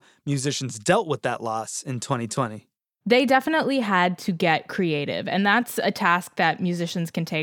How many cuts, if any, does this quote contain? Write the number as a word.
zero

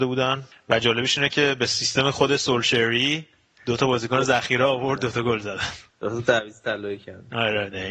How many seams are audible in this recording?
zero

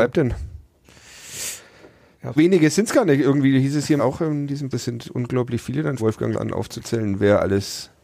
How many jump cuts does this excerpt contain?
five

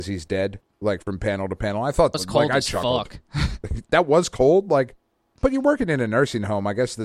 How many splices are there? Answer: one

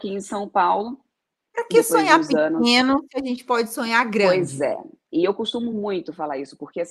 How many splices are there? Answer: zero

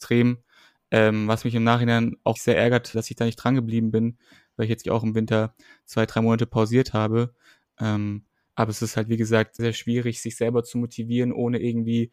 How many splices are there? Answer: four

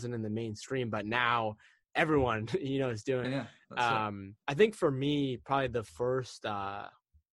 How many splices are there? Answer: two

